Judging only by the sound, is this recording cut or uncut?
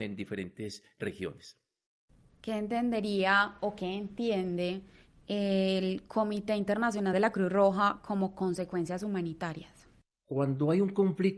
uncut